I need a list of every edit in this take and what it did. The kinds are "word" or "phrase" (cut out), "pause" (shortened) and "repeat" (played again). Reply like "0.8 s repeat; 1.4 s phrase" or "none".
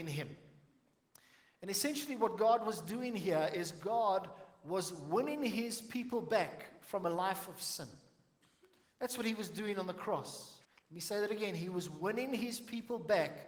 10.6 s pause